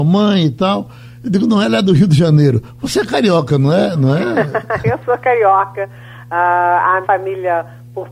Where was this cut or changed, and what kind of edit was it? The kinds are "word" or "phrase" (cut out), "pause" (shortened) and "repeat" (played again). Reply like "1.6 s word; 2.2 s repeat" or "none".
7.0 s word